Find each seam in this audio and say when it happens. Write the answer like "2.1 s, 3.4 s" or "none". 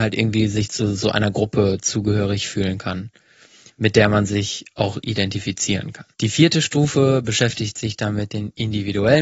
6.1 s